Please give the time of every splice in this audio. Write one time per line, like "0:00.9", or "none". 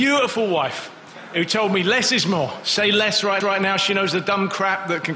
0:03.4

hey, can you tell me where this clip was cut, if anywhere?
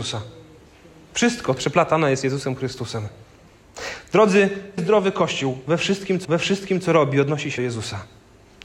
0:01.6
0:04.8
0:06.2
0:07.6

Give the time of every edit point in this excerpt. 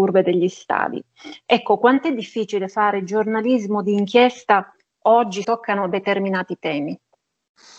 0:05.4

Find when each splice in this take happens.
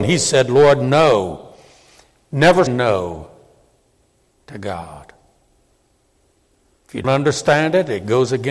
0:02.7
0:07.0

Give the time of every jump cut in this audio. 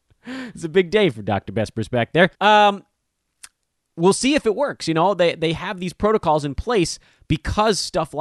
0:02.3

